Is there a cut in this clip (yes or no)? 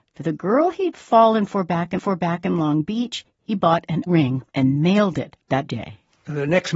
yes